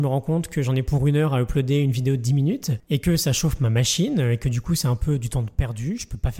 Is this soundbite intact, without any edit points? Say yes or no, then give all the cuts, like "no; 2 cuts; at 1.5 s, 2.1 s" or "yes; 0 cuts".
yes; 0 cuts